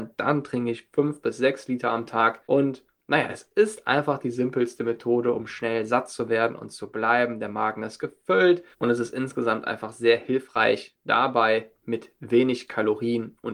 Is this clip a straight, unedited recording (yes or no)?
no